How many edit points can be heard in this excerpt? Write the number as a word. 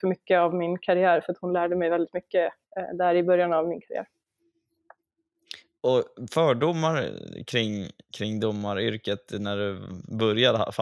zero